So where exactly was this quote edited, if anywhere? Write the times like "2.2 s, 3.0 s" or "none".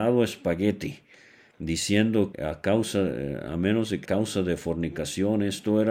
2.3 s, 4.1 s